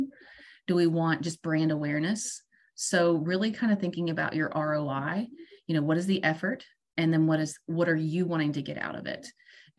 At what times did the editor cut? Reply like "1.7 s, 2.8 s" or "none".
none

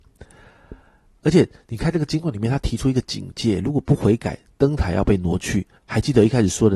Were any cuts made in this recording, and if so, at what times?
5.8 s

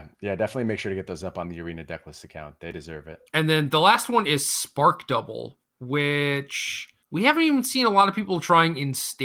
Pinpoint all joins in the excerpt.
3.3 s, 7.0 s

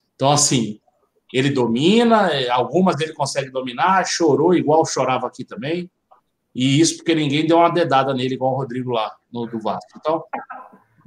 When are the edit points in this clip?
none

